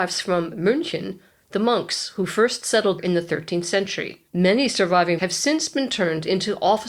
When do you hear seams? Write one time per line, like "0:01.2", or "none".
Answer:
0:03.0
0:04.3
0:05.2